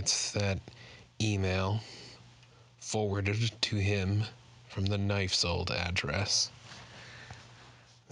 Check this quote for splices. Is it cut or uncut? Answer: uncut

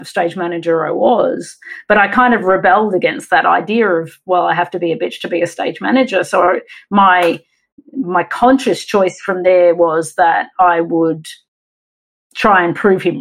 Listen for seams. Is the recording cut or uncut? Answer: uncut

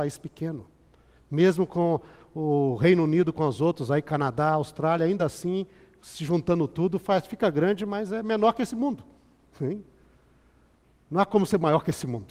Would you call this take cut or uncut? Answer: uncut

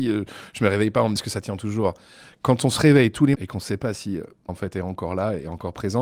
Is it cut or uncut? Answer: cut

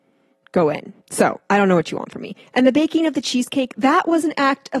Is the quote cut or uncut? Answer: cut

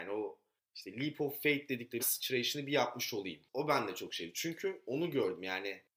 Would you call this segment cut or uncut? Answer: cut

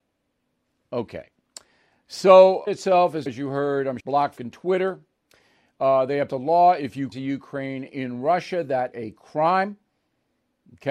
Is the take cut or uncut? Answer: cut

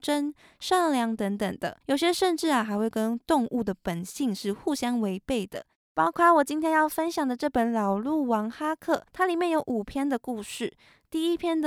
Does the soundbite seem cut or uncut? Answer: cut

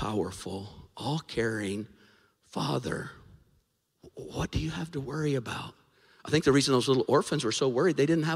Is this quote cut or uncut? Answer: uncut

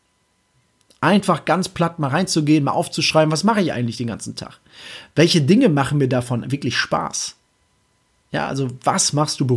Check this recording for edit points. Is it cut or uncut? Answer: uncut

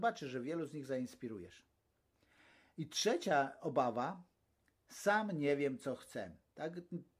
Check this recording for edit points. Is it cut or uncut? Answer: uncut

